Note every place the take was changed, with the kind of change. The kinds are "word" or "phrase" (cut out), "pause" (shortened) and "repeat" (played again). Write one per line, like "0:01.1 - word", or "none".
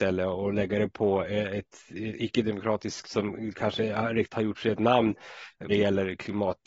0:03.0 - word
0:03.8 - word
0:04.3 - word
0:05.7 - word